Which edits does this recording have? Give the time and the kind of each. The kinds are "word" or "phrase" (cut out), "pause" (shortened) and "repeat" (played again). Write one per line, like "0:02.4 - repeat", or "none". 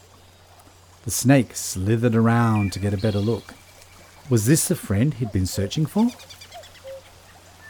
none